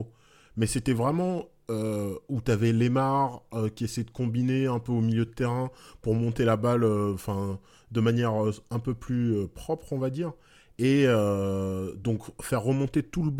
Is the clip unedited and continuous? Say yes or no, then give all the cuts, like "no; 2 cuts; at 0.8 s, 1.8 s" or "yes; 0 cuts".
yes; 0 cuts